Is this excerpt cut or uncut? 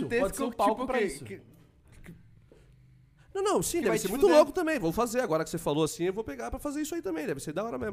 uncut